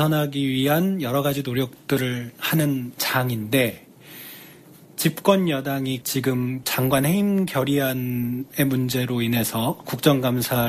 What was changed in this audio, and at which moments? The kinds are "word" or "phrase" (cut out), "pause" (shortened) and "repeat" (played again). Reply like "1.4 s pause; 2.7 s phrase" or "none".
none

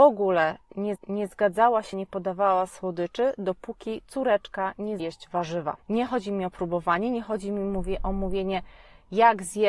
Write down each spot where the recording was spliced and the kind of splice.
1.0 s repeat; 1.9 s phrase; 5.0 s word; 5.8 s pause

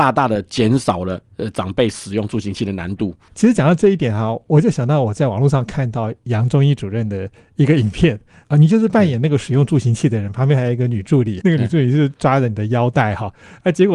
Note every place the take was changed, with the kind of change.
11.4 s word

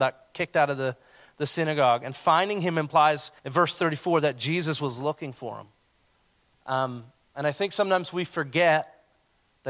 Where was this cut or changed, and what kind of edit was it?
3.4 s pause

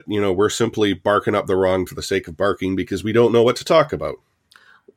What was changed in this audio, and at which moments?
1.9 s word

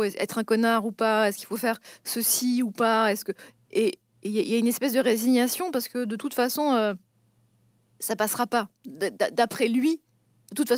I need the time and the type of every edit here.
none

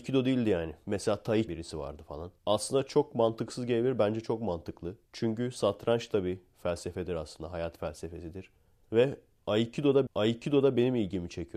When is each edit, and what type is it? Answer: 1.5 s phrase; 2.4 s pause; 5.1 s pause; 10.1 s repeat

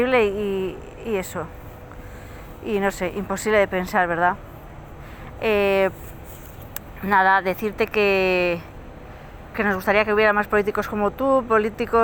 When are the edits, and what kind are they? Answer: 9.5 s word

